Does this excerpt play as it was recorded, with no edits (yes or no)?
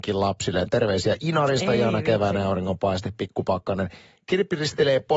yes